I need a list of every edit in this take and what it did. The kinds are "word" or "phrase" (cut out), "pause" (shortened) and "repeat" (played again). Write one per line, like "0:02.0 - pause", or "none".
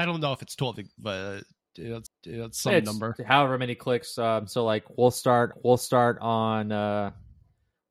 0:02.1 - repeat
0:05.5 - repeat